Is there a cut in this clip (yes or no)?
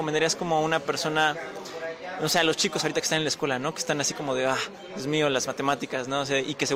no